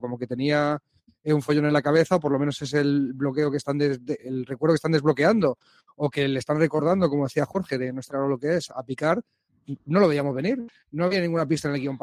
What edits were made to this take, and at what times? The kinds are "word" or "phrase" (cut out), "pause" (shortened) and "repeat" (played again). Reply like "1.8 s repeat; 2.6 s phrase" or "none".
4.2 s word; 8.1 s word; 8.7 s word